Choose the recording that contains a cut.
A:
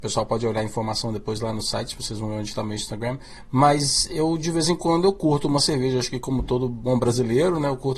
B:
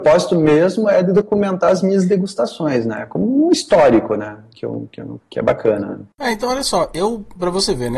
B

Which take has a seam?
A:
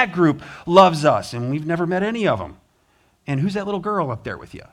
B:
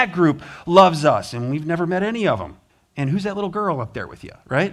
B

